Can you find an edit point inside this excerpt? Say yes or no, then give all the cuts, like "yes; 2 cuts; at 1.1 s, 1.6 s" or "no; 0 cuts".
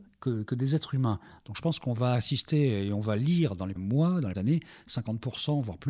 yes; 2 cuts; at 3.8 s, 4.3 s